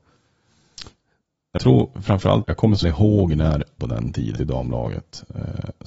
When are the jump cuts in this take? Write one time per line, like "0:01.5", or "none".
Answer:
0:01.6
0:02.4
0:02.8
0:03.8
0:04.4